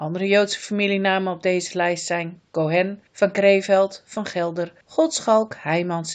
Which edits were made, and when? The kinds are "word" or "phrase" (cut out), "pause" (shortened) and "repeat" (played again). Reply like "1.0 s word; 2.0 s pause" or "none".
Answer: 3.1 s pause; 4.8 s pause